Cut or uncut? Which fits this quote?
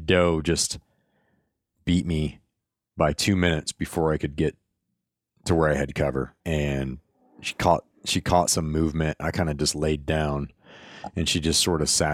cut